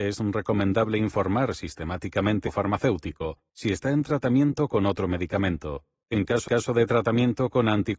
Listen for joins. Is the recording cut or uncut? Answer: cut